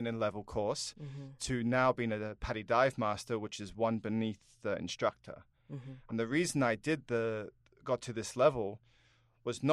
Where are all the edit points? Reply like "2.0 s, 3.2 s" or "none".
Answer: none

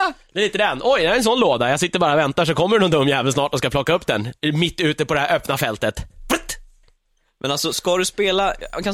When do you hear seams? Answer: none

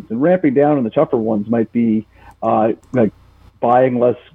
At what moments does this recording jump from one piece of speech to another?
2.8 s

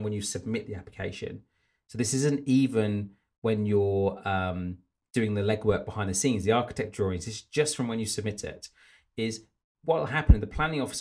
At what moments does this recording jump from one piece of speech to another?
none

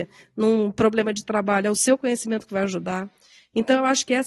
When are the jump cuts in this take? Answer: none

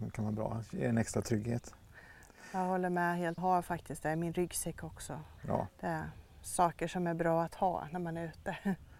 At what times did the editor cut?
3.4 s, 5.4 s

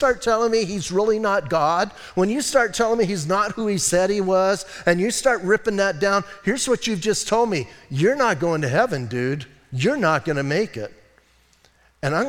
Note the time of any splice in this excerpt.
none

